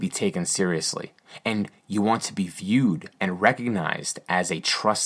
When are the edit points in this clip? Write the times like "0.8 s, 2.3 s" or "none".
none